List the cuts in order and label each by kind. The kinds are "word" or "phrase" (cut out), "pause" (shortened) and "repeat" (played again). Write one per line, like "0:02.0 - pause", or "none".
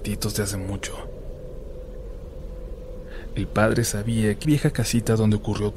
0:04.4 - word